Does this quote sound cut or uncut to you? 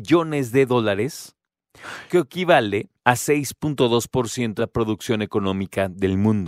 cut